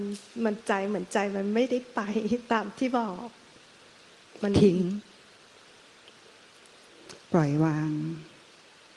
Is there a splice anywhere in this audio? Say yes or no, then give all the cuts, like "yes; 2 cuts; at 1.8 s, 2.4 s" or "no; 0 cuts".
no; 0 cuts